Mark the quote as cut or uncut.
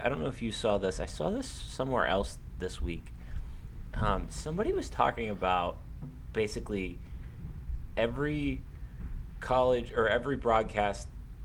uncut